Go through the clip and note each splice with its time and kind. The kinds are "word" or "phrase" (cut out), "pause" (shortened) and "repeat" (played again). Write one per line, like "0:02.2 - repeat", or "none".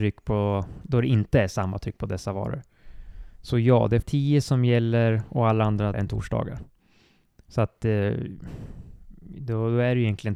0:04.0 - word
0:05.9 - word